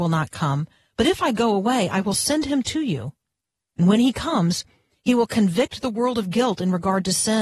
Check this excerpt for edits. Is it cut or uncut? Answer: uncut